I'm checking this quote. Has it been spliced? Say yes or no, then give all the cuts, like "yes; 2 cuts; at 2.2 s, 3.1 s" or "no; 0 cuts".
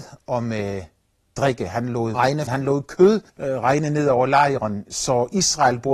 yes; 3 cuts; at 2.1 s, 2.5 s, 3.3 s